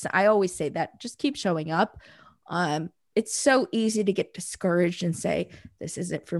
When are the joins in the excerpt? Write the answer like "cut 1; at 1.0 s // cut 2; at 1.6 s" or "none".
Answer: none